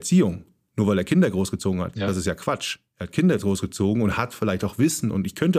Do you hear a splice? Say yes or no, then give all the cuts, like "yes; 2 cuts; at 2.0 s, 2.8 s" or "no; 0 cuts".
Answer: no; 0 cuts